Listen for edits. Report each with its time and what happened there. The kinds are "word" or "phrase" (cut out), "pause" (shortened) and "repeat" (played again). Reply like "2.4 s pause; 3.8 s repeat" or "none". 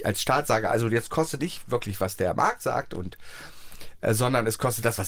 1.4 s phrase